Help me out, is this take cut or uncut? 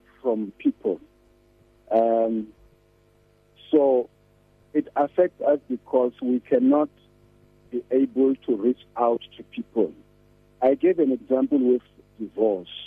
uncut